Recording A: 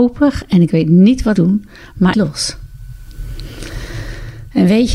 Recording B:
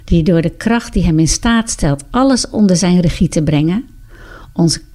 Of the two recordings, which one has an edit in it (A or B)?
A